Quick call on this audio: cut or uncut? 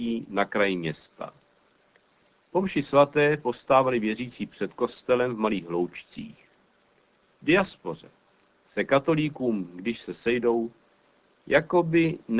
uncut